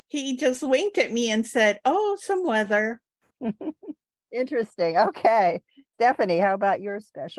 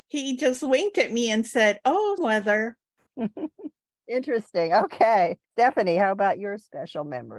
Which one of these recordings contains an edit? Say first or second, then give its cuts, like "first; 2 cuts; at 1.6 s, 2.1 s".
second; 2 cuts; at 2.2 s, 5.4 s